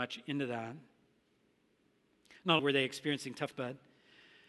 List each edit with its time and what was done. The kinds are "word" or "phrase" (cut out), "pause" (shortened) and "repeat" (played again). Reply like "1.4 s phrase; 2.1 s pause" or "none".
2.6 s word; 3.5 s word